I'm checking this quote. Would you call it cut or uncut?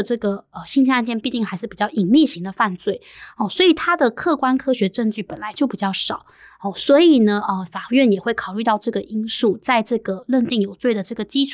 uncut